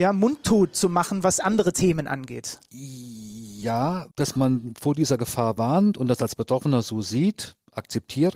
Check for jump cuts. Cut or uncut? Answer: cut